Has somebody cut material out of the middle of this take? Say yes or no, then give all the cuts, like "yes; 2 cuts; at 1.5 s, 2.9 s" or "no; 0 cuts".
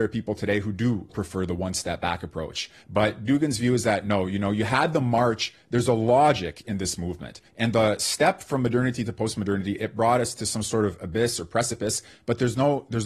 yes; 4 cuts; at 1.1 s, 2.8 s, 6.6 s, 7.5 s